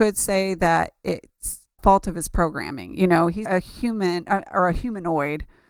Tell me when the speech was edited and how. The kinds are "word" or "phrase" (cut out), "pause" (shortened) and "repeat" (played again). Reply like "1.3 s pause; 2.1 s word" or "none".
1.8 s word; 3.5 s word